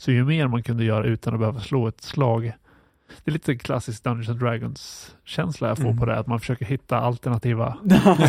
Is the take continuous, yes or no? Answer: yes